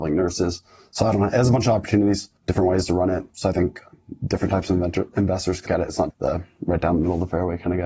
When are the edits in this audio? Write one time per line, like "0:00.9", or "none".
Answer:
0:02.4
0:03.3
0:05.7
0:06.1